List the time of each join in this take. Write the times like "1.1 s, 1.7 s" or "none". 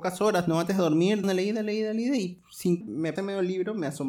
1.2 s, 2.8 s, 3.2 s